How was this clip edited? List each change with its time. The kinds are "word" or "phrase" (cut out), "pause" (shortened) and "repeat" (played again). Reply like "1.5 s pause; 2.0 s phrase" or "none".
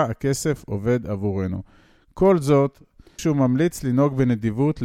3.2 s word